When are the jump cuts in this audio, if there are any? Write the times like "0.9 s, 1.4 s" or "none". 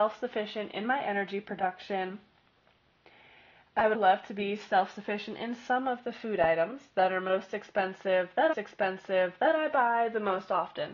3.9 s, 8.5 s